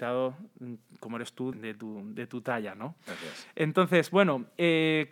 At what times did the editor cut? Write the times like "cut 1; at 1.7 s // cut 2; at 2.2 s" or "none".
cut 1; at 1.5 s

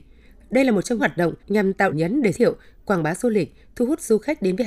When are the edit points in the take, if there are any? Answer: cut 1; at 1.0 s // cut 2; at 1.4 s // cut 3; at 1.9 s // cut 4; at 2.3 s

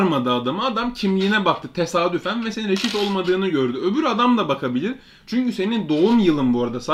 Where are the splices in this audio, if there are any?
none

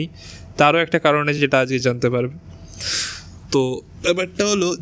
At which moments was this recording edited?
none

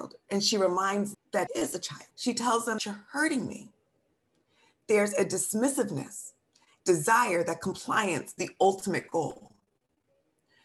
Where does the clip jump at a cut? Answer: cut 1; at 1.1 s // cut 2; at 1.5 s // cut 3; at 2.1 s // cut 4; at 2.8 s // cut 5; at 6.8 s // cut 6; at 8.4 s

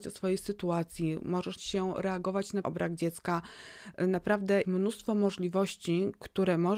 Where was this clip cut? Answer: cut 1; at 1.6 s // cut 2; at 2.6 s // cut 3; at 4.6 s

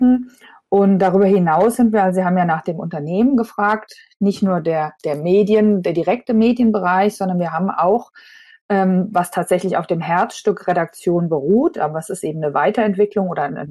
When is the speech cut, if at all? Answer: none

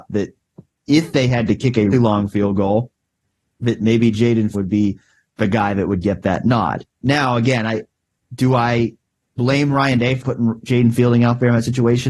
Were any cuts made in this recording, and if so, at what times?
cut 1; at 1.9 s // cut 2; at 4.5 s // cut 3; at 9.2 s // cut 4; at 10.2 s

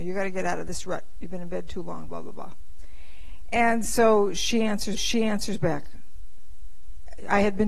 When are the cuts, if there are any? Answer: cut 1; at 2.1 s // cut 2; at 5.0 s

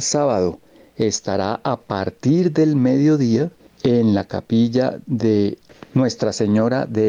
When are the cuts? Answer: cut 1; at 3.6 s

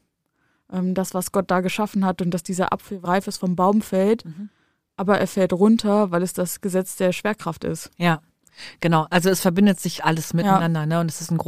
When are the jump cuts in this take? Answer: cut 1; at 3.0 s // cut 2; at 10.0 s

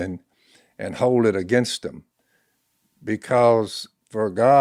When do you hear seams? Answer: none

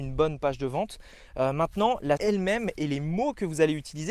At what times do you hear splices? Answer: cut 1; at 2.2 s

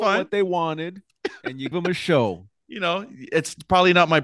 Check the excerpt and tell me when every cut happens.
cut 1; at 1.7 s

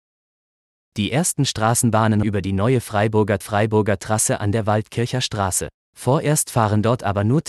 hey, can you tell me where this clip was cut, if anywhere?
cut 1; at 2.2 s // cut 2; at 3.4 s // cut 3; at 5.8 s

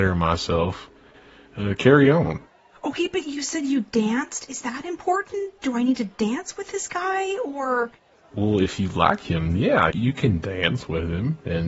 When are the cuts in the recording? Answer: cut 1; at 9.9 s

